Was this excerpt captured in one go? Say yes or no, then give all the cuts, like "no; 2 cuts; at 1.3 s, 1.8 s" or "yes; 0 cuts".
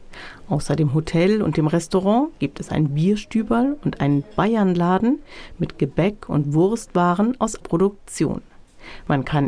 no; 1 cut; at 7.6 s